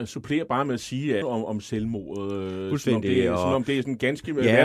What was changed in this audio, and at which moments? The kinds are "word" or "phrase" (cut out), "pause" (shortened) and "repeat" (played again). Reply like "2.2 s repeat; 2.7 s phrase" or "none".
1.2 s phrase